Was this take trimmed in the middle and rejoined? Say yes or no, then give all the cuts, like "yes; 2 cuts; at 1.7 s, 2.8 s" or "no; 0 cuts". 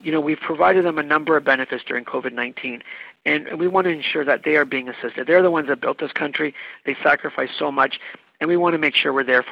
no; 0 cuts